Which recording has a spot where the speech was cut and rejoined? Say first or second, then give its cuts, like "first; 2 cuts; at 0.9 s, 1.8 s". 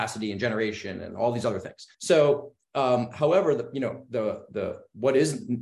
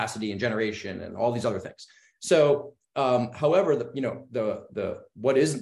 first; 1 cut; at 1.9 s